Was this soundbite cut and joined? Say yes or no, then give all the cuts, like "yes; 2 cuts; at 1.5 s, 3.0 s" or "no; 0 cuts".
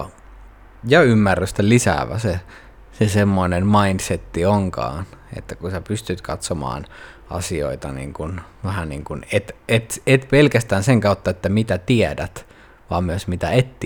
no; 0 cuts